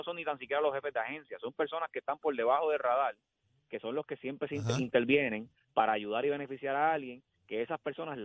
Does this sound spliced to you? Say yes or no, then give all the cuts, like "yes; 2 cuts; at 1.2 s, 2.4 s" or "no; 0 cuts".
no; 0 cuts